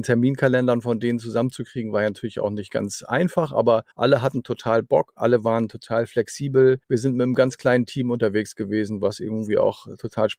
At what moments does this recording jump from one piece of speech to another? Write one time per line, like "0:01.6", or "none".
0:03.9
0:06.8

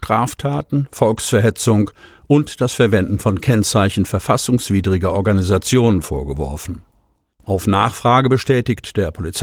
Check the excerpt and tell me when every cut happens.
none

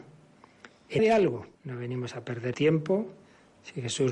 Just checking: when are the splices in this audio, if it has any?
0:01.0
0:01.5
0:02.5

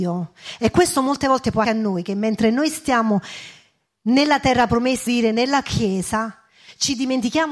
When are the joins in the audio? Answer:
0:01.6
0:05.1

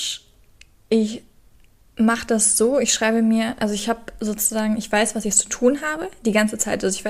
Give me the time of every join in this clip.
none

